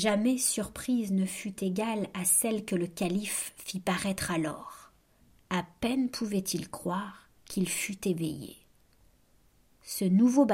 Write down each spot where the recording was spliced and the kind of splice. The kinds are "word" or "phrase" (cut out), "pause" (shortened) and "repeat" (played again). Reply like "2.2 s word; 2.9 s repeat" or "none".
7.4 s pause